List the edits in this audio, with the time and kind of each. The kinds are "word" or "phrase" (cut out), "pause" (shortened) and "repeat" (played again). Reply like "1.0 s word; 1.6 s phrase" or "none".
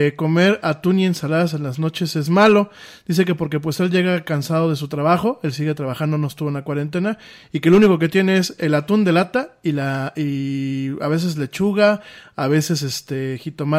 none